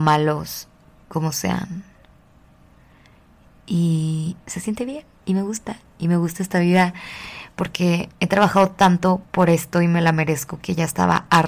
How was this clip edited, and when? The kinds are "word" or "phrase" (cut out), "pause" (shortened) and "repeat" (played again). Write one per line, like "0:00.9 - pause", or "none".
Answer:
0:04.4 - pause
0:05.1 - pause
0:09.2 - pause